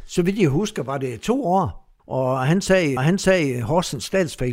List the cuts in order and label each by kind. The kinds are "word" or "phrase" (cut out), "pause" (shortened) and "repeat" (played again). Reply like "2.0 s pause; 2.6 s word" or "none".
2.0 s pause; 3.0 s repeat